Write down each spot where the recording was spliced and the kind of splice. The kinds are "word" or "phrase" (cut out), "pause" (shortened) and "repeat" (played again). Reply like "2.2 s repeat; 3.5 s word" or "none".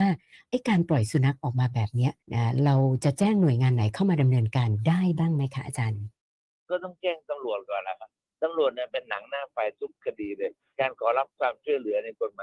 2.2 s pause